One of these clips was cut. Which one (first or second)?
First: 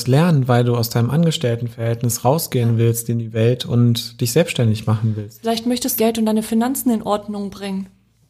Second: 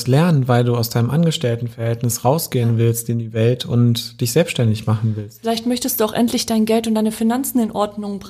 first